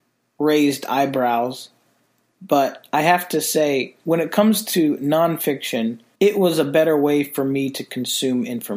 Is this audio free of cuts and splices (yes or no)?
no